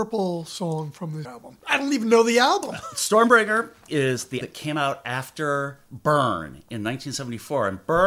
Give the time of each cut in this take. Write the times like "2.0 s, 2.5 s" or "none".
1.2 s, 4.4 s